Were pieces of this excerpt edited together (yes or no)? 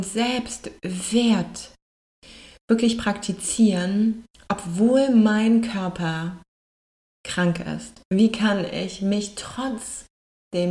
yes